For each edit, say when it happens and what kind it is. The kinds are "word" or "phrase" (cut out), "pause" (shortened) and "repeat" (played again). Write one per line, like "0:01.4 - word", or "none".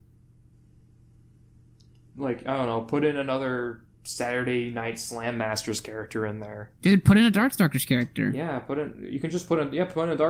0:03.9 - pause
0:06.8 - pause